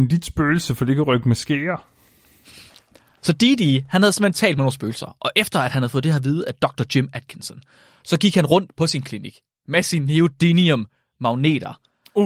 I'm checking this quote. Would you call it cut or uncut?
uncut